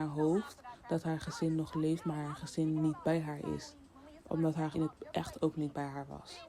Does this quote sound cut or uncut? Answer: cut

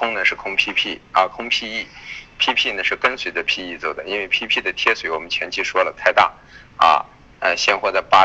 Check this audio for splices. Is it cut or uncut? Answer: uncut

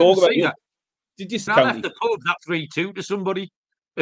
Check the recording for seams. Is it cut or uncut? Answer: cut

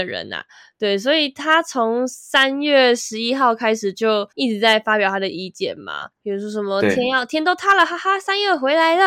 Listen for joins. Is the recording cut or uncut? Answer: cut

